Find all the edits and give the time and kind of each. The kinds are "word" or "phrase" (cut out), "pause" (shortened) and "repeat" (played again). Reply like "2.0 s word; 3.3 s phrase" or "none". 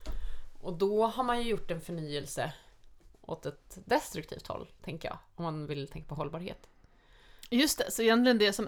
3.1 s pause